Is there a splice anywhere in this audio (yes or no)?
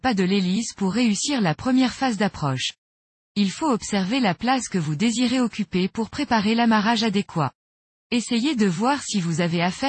no